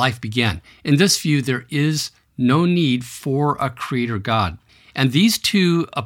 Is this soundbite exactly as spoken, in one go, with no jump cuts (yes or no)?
yes